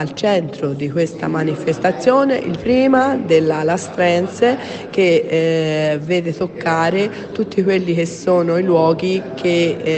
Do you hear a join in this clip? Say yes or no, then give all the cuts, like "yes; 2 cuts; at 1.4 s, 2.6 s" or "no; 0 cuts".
yes; 1 cut; at 2.6 s